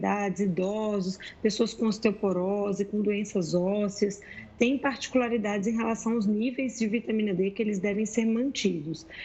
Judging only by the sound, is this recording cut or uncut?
uncut